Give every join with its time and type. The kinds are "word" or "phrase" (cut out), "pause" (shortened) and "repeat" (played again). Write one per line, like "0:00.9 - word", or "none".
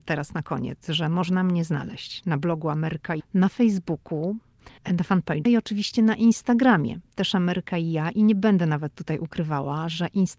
0:03.2 - word
0:04.8 - pause
0:05.5 - phrase